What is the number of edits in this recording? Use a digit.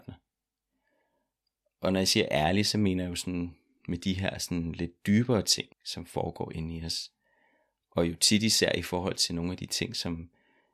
1